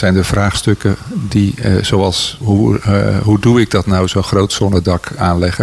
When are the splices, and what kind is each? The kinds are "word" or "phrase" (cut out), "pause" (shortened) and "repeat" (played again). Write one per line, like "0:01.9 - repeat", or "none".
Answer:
0:02.4 - word